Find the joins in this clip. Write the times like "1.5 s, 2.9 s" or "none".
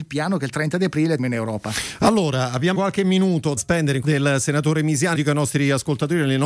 1.2 s, 2.7 s, 3.6 s, 4.0 s, 5.1 s